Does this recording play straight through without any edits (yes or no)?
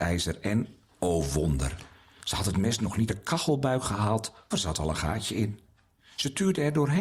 no